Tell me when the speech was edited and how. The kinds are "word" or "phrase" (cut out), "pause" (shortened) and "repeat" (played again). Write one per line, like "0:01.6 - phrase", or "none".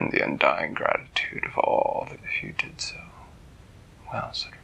0:02.2 - word